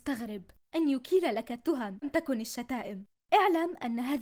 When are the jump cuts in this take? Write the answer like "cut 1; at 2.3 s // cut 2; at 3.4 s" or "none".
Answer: cut 1; at 2.0 s